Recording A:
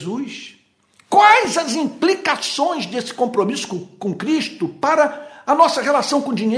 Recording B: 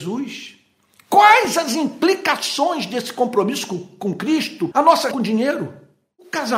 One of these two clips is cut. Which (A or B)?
B